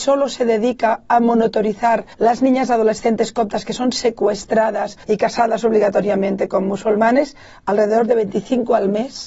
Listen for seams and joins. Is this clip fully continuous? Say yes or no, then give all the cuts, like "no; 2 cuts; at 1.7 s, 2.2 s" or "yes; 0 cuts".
no; 2 cuts; at 2.1 s, 5.0 s